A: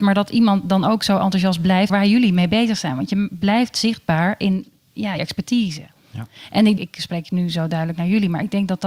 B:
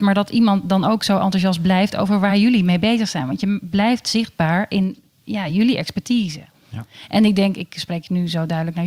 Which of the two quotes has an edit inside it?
A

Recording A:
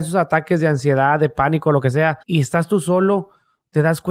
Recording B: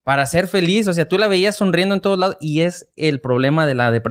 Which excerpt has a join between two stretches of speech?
A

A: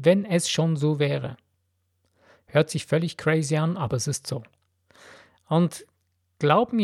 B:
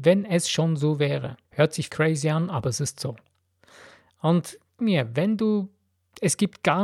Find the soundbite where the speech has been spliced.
B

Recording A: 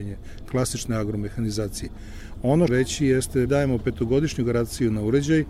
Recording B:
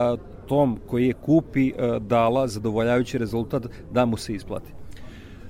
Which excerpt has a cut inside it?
A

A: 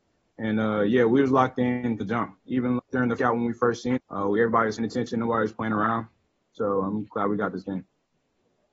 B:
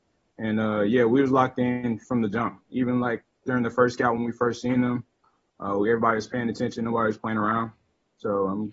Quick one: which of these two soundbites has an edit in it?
A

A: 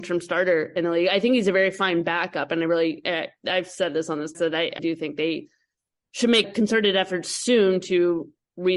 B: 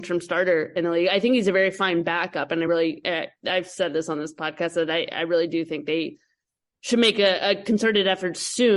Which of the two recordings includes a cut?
A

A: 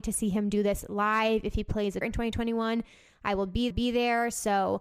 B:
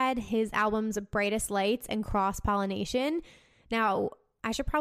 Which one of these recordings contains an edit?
A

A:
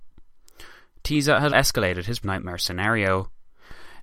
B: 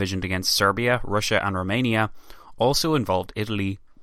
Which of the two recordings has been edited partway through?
A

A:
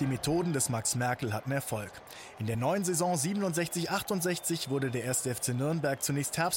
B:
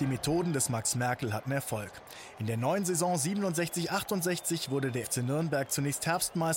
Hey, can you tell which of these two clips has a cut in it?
B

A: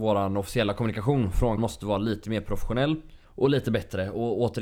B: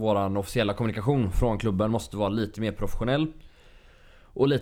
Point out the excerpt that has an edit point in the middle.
A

